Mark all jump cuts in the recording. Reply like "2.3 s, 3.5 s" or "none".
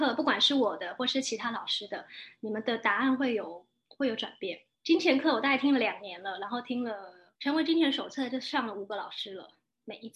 4.7 s, 7.4 s